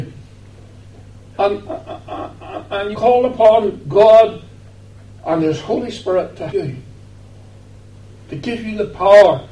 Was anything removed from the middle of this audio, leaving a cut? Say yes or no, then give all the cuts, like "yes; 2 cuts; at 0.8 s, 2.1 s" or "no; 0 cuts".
yes; 3 cuts; at 1.6 s, 2.9 s, 6.5 s